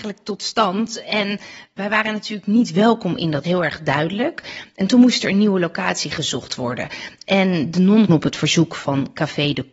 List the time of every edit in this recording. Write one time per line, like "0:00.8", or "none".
0:03.4
0:08.1